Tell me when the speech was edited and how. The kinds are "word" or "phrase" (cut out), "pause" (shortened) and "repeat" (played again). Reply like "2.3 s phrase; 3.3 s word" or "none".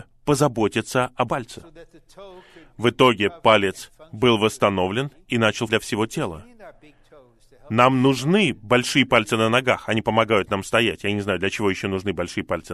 1.3 s word; 5.7 s word